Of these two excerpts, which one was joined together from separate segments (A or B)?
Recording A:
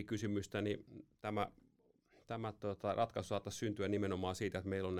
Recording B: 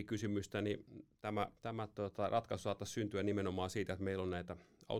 B